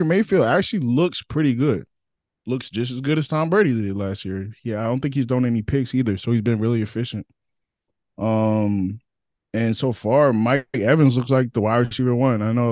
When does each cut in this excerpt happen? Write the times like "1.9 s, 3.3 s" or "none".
none